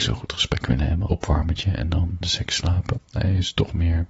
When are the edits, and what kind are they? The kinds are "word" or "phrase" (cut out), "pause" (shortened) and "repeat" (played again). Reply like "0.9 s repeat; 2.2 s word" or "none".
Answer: 1.1 s word; 2.2 s word; 3.0 s word